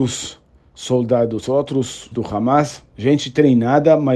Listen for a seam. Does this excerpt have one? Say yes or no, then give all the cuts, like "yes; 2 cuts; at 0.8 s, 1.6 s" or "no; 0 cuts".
yes; 1 cut; at 2.1 s